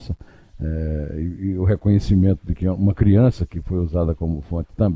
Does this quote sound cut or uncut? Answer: uncut